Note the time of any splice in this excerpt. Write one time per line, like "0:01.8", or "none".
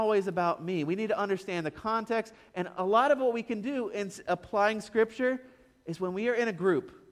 none